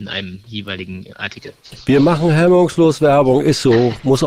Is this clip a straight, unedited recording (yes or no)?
yes